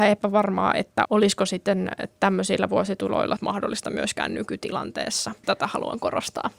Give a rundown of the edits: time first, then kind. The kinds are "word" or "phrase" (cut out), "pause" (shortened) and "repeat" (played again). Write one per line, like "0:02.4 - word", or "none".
0:01.0 - word
0:03.4 - phrase
0:05.4 - word